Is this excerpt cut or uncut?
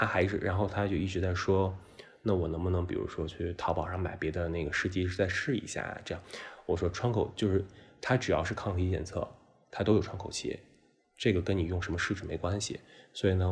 uncut